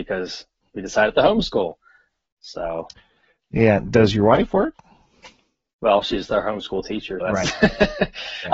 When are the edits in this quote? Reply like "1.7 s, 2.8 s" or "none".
7.2 s

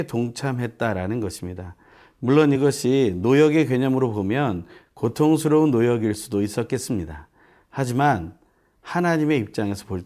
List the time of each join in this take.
none

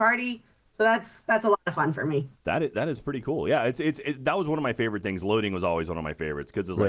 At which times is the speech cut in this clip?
2.3 s

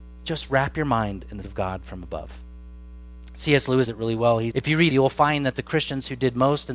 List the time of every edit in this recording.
1.4 s, 3.9 s, 4.5 s, 4.9 s

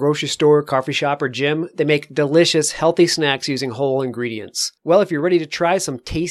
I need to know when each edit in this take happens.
4.8 s

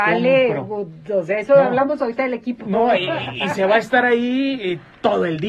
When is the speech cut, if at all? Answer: none

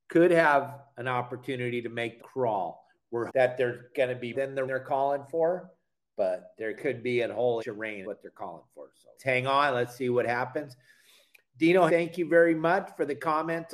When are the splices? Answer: 2.2 s, 3.3 s, 4.3 s, 4.7 s, 7.6 s, 8.0 s, 9.2 s, 11.9 s

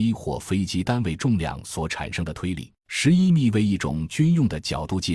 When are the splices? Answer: 2.8 s

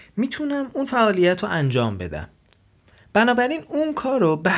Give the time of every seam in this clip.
none

